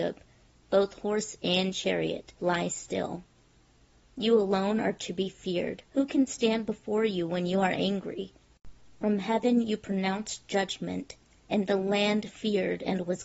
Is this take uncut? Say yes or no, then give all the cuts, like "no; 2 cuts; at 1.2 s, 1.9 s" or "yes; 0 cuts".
no; 2 cuts; at 2.3 s, 5.8 s